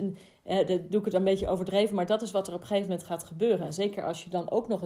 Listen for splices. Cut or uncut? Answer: uncut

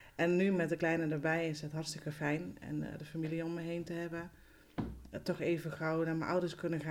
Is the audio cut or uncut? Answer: uncut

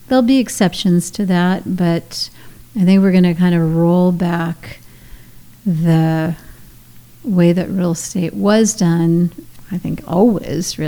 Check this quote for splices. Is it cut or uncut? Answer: uncut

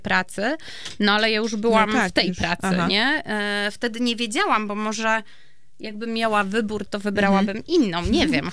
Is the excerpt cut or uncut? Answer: cut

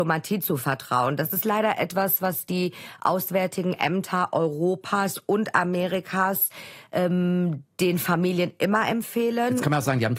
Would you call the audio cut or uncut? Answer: uncut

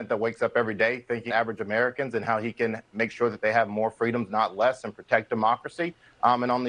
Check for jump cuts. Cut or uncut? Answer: cut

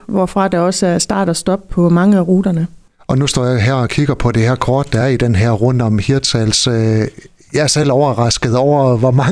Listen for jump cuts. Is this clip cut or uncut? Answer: uncut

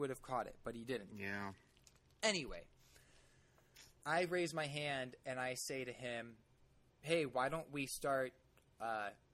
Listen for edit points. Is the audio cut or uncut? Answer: uncut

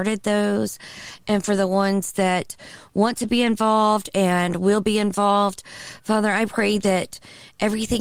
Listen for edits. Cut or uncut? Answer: uncut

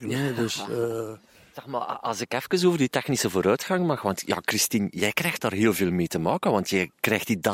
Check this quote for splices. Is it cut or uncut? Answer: uncut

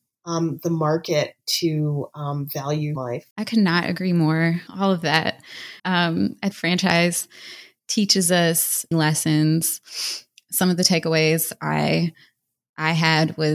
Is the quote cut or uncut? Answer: cut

